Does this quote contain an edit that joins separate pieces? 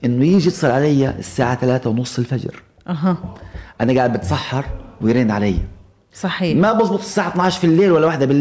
no; 0 cuts

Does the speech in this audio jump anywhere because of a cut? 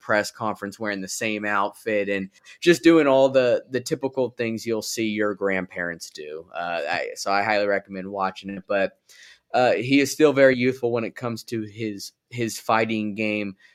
no; 0 cuts

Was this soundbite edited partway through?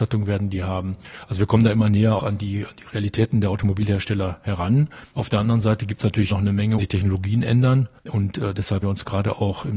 yes; 6 cuts; at 2.2 s, 5.0 s, 6.3 s, 6.8 s, 8.0 s, 8.8 s

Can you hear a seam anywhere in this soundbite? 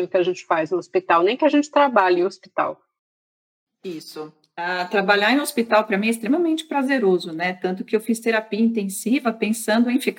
no; 0 cuts

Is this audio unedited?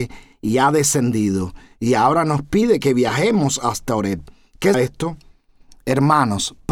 no; 1 cut; at 4.7 s

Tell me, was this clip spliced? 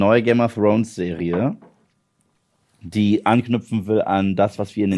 no; 0 cuts

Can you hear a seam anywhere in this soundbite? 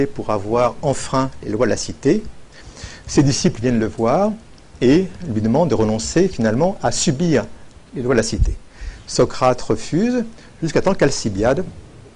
yes; 1 cut; at 7.9 s

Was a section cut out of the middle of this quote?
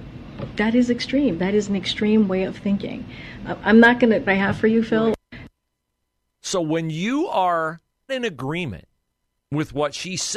yes; 2 cuts; at 4.3 s, 8.1 s

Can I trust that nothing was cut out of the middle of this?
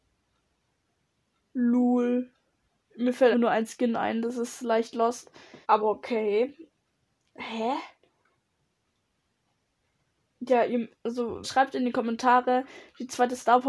no; 3 cuts; at 3.3 s, 5.6 s, 11.4 s

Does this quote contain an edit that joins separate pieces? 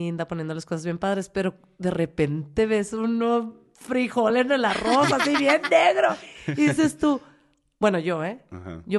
no; 0 cuts

